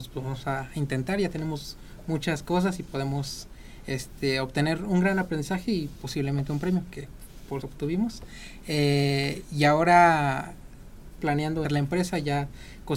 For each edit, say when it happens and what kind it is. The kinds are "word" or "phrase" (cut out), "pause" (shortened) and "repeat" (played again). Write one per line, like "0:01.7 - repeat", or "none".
0:07.6 - phrase
0:11.2 - word
0:11.6 - phrase